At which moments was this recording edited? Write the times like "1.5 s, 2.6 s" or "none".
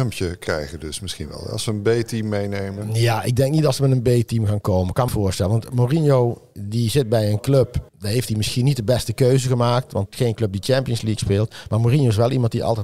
5.1 s, 7.9 s, 10.1 s